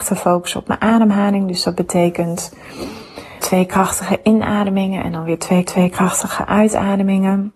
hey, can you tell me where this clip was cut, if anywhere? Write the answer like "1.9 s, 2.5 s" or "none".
3.4 s, 5.6 s